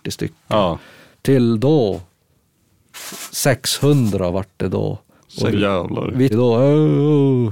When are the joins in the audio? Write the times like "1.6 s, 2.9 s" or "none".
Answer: 5.2 s, 5.5 s, 6.3 s